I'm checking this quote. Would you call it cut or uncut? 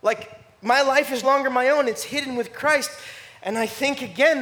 cut